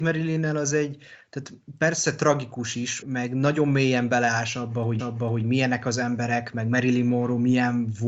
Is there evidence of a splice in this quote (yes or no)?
yes